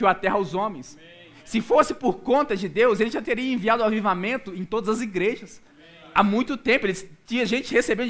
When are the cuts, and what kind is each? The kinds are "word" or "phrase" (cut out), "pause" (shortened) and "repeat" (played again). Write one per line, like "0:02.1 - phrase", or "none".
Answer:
none